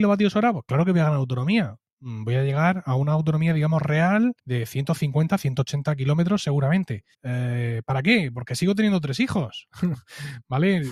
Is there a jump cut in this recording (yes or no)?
yes